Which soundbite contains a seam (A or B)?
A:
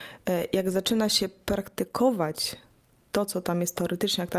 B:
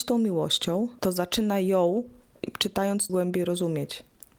B